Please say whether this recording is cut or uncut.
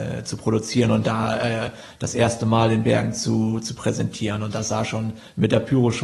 uncut